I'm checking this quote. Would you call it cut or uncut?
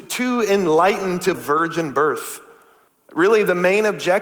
cut